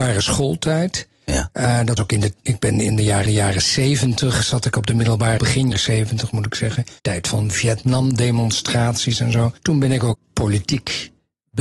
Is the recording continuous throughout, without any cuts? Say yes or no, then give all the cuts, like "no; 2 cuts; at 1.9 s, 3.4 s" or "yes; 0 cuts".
no; 7 cuts; at 2.0 s, 3.3 s, 5.4 s, 5.7 s, 7.0 s, 9.6 s, 10.1 s